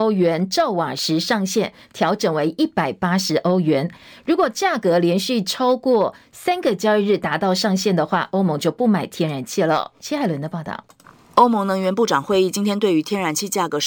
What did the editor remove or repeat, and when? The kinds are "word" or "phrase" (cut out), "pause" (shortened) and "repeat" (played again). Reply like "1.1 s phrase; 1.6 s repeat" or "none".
none